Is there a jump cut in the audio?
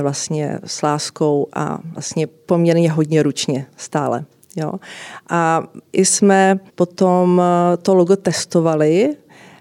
yes; 1 cut; at 6.7 s

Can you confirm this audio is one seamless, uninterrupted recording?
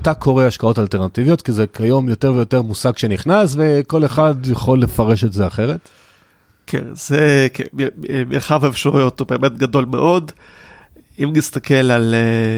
yes; 0 cuts

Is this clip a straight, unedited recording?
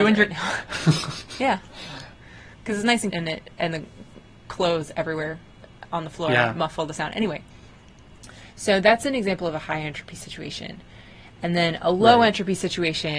no; 2 cuts; at 2.5 s, 3.1 s

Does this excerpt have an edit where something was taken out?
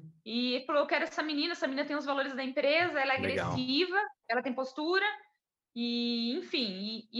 yes; 1 cut; at 4.2 s

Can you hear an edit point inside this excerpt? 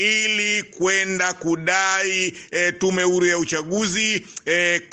no; 0 cuts

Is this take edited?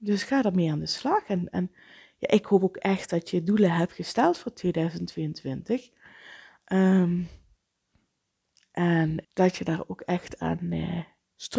yes; 1 cut; at 9.2 s

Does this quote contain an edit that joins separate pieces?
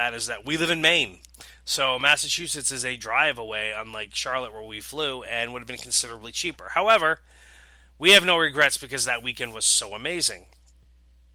no; 0 cuts

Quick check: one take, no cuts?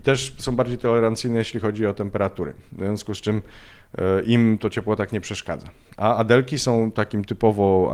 yes; 0 cuts

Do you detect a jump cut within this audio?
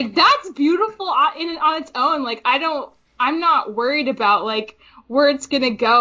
no; 0 cuts

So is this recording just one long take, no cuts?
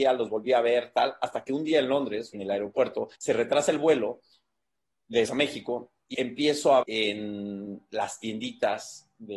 no; 5 cuts; at 2.3 s, 3.2 s, 5.2 s, 6.1 s, 6.8 s

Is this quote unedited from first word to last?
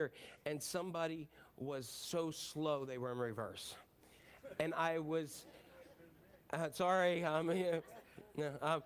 yes; 0 cuts

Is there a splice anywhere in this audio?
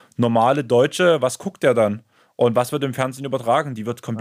no; 0 cuts

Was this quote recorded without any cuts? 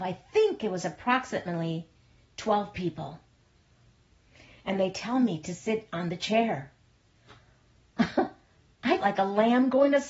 no; 1 cut; at 9.0 s

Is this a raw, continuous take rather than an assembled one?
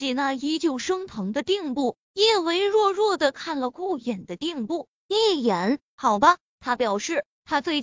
no; 1 cut; at 2.0 s

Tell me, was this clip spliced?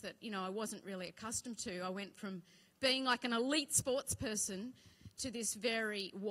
no; 0 cuts

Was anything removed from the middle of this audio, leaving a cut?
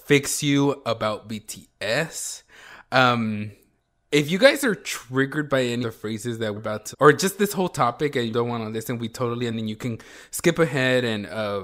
yes; 5 cuts; at 5.8 s, 6.6 s, 6.9 s, 8.3 s, 9.5 s

